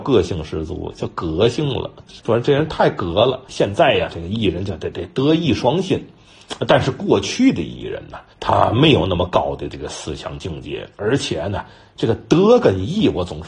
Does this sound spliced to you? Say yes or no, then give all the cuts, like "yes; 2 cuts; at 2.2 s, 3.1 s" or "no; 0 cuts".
yes; 3 cuts; at 3.4 s, 4.1 s, 8.3 s